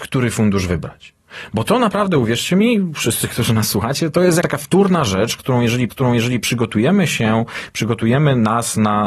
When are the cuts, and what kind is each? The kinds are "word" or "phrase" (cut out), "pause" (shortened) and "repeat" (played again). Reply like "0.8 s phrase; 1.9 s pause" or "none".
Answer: 4.4 s word; 5.9 s repeat